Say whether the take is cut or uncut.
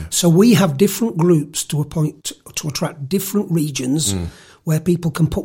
cut